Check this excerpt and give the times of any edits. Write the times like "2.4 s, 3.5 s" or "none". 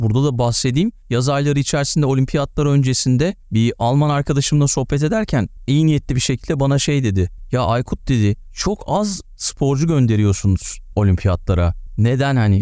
none